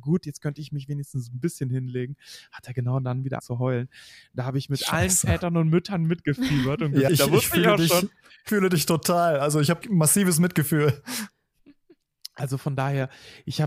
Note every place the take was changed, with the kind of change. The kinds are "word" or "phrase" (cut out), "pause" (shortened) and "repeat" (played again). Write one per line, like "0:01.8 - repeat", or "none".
0:03.4 - word
0:07.1 - word
0:08.5 - word
0:09.8 - word